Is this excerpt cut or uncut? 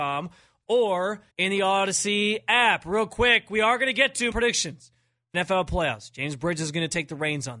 cut